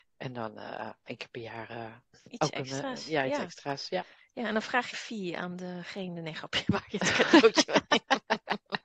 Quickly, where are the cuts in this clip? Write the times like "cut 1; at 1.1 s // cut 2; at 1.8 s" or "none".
cut 1; at 1.1 s // cut 2; at 2.1 s // cut 3; at 4.9 s